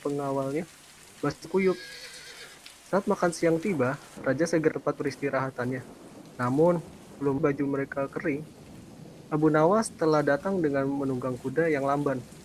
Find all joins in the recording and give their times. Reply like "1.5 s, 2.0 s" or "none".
4.7 s, 7.4 s